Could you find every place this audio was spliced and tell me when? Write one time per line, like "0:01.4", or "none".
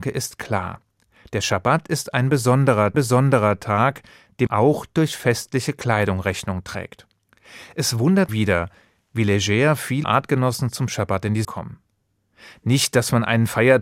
0:02.9
0:04.5
0:08.3
0:10.0
0:11.4